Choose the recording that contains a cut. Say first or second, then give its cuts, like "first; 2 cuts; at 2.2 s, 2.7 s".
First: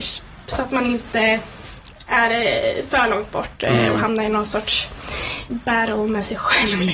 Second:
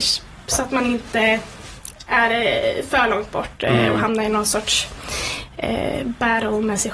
first; 1 cut; at 5.5 s